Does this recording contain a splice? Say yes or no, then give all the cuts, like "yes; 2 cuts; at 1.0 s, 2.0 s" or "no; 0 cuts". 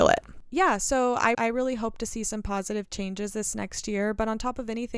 yes; 1 cut; at 1.3 s